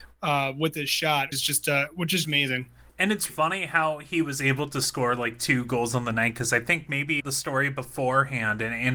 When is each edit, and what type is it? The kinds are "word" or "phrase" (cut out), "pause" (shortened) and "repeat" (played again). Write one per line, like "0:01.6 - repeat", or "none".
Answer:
0:01.3 - word
0:02.2 - word
0:03.3 - word
0:07.2 - word